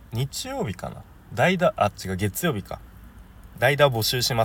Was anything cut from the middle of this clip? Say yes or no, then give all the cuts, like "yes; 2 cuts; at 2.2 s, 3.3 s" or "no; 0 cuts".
no; 0 cuts